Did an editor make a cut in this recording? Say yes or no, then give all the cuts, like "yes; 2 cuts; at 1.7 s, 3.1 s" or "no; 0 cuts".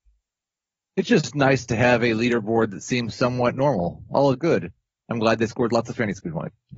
yes; 1 cut; at 4.3 s